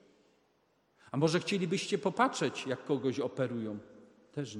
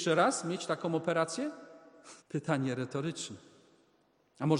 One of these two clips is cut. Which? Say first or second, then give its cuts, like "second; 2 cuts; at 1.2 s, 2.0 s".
second; 1 cut; at 2.2 s